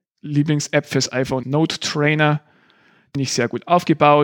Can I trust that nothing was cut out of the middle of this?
no; 2 cuts; at 1.4 s, 3.1 s

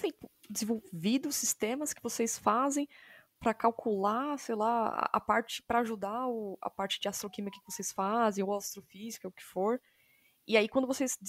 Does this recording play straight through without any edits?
yes; 0 cuts

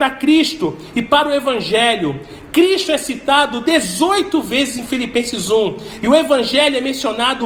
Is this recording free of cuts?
yes; 0 cuts

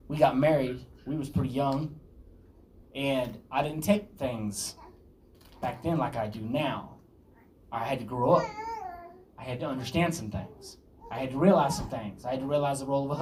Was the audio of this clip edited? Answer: no; 0 cuts

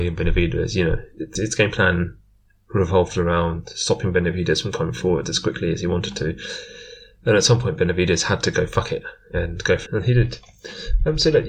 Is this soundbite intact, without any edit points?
no; 2 cuts; at 1.4 s, 9.9 s

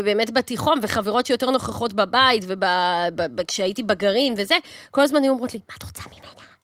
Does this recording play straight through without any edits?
yes; 0 cuts

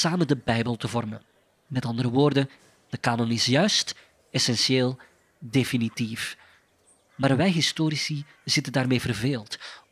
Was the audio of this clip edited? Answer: no; 0 cuts

